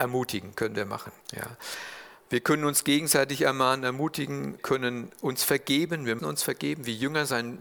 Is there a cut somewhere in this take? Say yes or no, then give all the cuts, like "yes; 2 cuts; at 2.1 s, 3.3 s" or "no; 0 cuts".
yes; 3 cuts; at 1.2 s, 4.6 s, 6.2 s